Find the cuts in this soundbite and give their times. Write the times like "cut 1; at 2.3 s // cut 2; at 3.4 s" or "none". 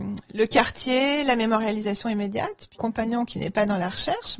cut 1; at 2.8 s